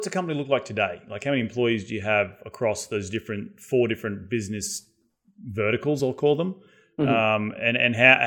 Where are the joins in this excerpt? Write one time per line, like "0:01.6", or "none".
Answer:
none

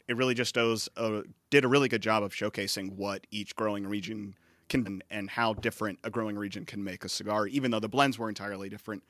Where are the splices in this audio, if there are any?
0:04.8

